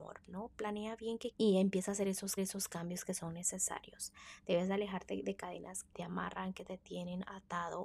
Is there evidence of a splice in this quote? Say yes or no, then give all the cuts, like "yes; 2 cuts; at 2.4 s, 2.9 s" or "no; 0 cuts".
yes; 3 cuts; at 1.3 s, 2.4 s, 5.9 s